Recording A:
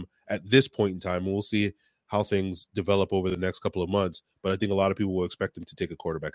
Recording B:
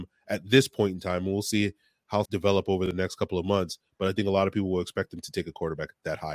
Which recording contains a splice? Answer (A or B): B